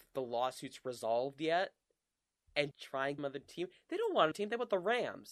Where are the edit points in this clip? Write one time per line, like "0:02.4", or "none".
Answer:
0:02.7
0:03.2
0:04.3

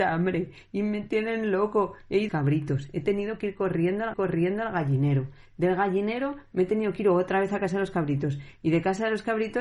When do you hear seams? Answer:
0:02.3
0:04.1

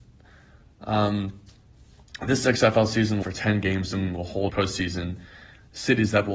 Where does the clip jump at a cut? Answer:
0:03.2
0:04.5

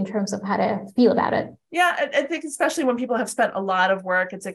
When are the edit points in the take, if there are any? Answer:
none

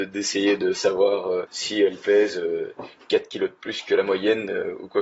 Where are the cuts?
none

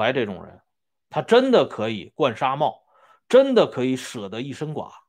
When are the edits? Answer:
none

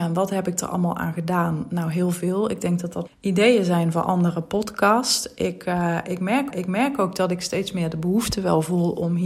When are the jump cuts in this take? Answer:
0:03.1
0:06.5

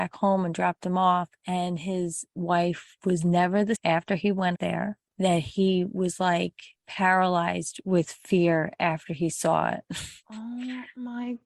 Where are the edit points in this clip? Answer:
0:03.0
0:03.7
0:04.5
0:06.7

